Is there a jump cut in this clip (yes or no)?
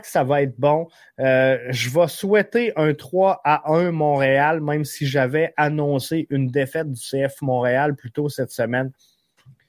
no